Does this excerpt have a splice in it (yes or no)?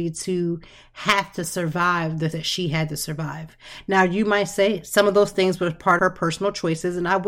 yes